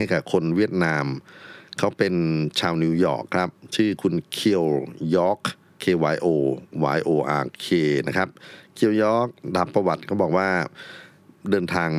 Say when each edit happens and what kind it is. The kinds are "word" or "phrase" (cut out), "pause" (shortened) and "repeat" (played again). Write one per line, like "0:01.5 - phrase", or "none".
0:05.7 - pause

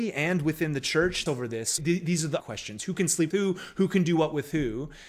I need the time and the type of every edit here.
0:01.3 - phrase
0:01.8 - word
0:02.4 - word
0:03.3 - word

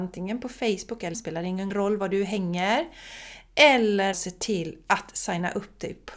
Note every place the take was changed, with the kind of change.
0:01.1 - word
0:01.7 - phrase
0:04.1 - word

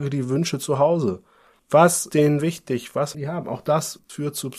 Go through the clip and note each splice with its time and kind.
0:02.1 - word
0:03.1 - word

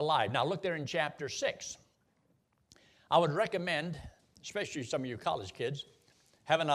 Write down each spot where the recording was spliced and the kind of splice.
none

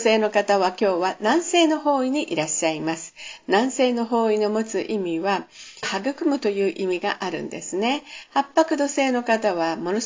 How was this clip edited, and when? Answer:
0:05.8 - phrase

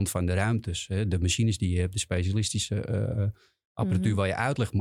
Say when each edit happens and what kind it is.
none

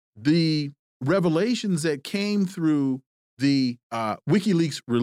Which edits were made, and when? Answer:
0:03.8 - pause

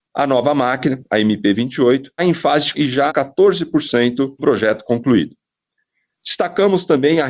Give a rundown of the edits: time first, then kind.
0:02.2 - word
0:02.7 - word
0:03.1 - word
0:04.4 - word

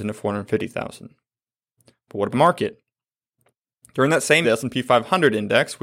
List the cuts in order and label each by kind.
0:02.3 - word
0:04.4 - word

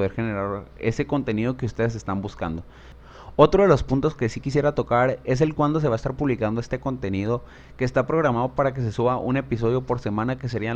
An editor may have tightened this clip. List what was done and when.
none

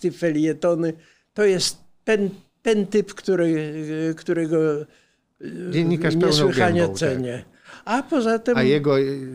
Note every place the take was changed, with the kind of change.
none

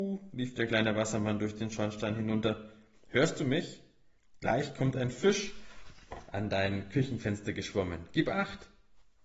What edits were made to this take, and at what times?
none

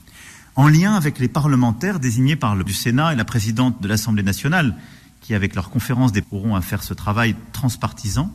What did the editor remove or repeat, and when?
0:02.7 - word
0:06.2 - word

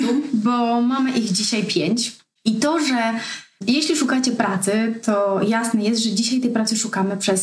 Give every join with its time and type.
none

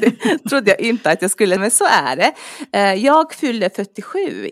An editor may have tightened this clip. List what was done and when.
0:01.6 - word

